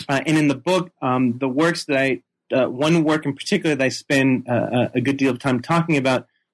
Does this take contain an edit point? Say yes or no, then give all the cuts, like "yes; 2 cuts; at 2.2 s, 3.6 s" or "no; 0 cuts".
no; 0 cuts